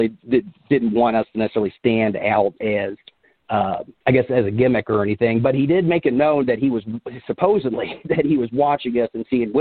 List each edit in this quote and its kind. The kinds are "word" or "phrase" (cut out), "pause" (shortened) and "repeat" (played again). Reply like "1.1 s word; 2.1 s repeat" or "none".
4.0 s pause